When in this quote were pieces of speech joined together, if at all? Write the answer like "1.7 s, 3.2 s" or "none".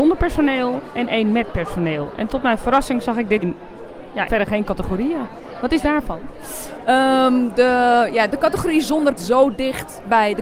3.4 s, 4.3 s, 5.8 s, 8.3 s, 9.2 s